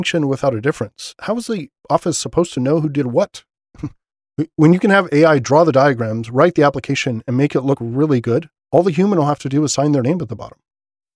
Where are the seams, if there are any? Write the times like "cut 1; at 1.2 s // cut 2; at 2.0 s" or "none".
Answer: cut 1; at 1.8 s // cut 2; at 8.6 s